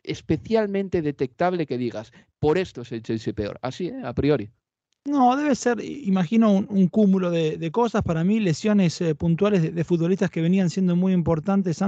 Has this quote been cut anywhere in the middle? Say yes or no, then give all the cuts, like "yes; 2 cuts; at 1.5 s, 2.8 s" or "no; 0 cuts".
no; 0 cuts